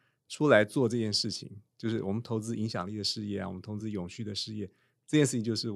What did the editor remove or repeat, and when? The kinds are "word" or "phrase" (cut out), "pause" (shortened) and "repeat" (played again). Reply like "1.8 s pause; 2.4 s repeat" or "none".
none